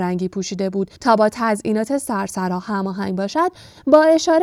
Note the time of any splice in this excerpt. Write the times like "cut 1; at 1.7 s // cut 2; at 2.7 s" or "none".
cut 1; at 1.0 s